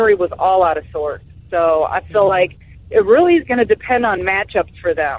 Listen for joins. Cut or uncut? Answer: uncut